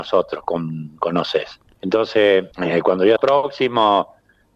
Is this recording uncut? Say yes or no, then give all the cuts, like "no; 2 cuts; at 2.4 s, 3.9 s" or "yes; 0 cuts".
no; 2 cuts; at 2.5 s, 3.2 s